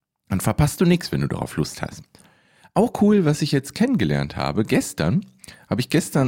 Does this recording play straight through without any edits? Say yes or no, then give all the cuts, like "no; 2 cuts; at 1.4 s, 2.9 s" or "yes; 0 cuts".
yes; 0 cuts